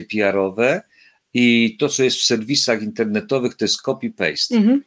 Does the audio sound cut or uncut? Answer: uncut